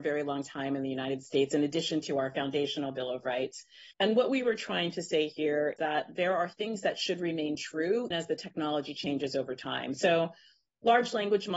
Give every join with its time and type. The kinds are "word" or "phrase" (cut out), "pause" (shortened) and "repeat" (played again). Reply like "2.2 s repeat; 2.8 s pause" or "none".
3.9 s pause; 5.8 s word; 8.1 s word